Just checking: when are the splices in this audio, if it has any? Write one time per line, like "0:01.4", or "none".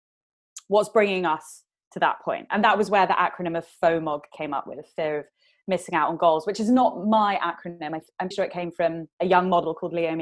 0:08.3
0:09.1